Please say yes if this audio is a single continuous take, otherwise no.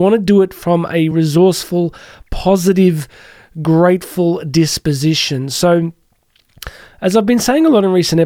yes